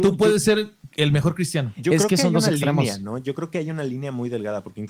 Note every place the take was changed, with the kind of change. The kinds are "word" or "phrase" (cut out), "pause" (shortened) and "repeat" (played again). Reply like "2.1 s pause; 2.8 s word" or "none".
none